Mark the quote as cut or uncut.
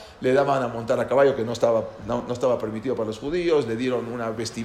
uncut